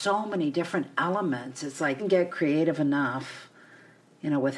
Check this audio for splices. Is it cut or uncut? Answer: cut